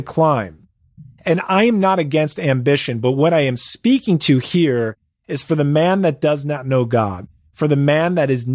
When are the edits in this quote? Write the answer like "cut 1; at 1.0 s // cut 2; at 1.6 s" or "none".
none